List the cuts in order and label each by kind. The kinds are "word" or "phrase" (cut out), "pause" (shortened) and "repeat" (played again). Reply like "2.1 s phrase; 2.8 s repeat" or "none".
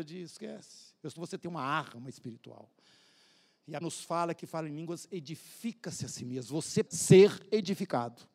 1.2 s word; 3.8 s word; 4.4 s word; 6.9 s word